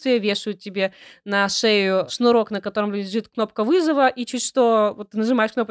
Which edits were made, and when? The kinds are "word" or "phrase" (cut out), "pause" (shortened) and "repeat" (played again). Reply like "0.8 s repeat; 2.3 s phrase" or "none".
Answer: none